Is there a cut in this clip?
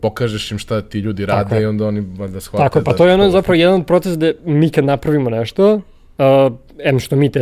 no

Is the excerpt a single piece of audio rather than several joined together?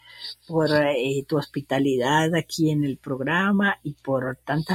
yes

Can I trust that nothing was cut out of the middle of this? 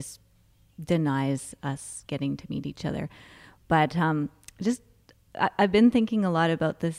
yes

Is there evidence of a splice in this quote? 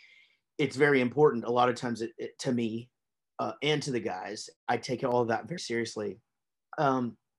yes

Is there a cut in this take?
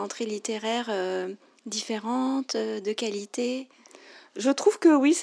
no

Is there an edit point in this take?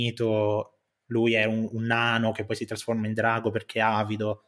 no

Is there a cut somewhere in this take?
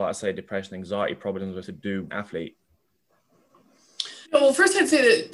yes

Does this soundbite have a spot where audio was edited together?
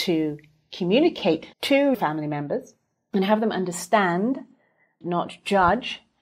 yes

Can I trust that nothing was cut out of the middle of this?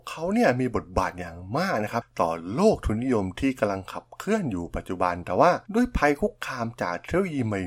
no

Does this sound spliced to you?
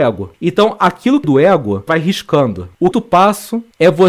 yes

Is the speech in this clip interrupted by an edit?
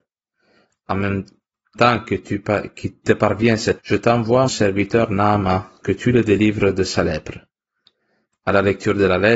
yes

